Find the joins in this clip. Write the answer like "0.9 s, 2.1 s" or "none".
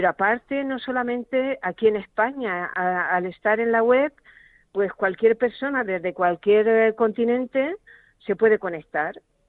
none